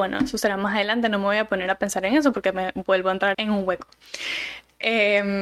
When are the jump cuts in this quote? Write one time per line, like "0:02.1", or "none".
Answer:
0:03.3